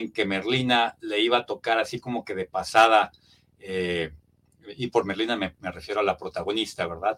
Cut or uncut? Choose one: uncut